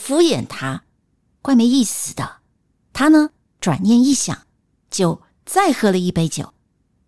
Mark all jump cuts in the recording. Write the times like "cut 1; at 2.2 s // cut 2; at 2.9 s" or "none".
none